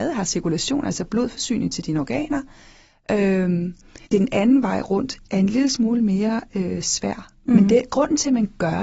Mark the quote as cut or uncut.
cut